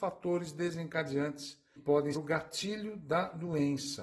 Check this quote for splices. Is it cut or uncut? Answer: cut